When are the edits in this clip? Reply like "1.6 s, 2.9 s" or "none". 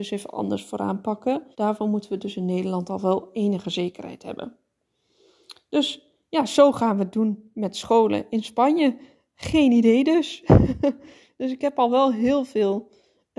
1.5 s